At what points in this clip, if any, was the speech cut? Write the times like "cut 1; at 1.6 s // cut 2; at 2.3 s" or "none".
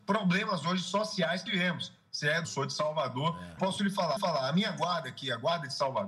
cut 1; at 1.5 s // cut 2; at 2.4 s // cut 3; at 3.6 s // cut 4; at 4.2 s